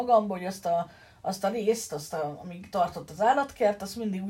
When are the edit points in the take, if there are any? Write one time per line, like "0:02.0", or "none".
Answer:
none